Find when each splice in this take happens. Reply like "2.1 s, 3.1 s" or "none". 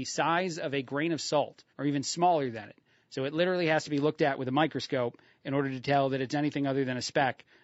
1.7 s